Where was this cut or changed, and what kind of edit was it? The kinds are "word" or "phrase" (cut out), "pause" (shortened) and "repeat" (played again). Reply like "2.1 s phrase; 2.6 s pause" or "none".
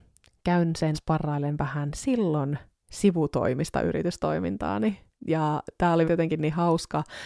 0.9 s word; 5.2 s pause; 6.0 s word